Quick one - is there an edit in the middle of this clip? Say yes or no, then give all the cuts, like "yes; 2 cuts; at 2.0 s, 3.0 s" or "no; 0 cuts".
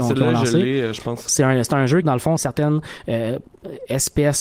yes; 2 cuts; at 2.0 s, 2.4 s